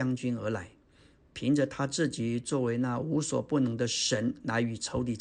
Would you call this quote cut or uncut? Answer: uncut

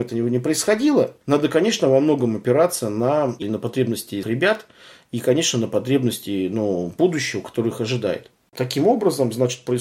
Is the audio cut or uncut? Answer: cut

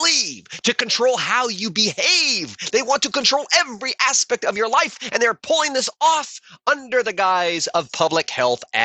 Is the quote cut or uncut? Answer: uncut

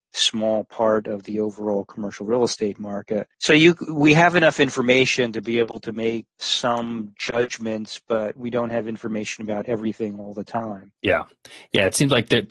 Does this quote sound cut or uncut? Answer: cut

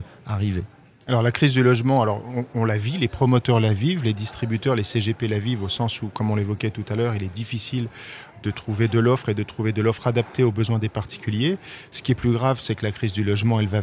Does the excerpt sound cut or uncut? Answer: uncut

